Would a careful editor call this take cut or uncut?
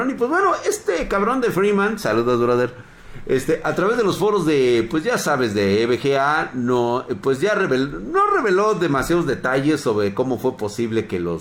uncut